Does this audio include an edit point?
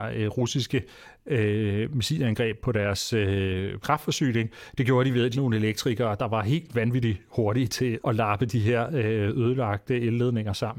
yes; 3 cuts; at 3.8 s, 5.3 s, 8.0 s

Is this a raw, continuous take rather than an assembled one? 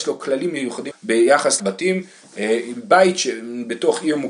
no; 2 cuts; at 0.9 s, 1.6 s

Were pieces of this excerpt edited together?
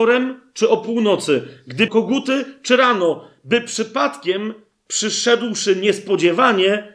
yes; 1 cut; at 1.9 s

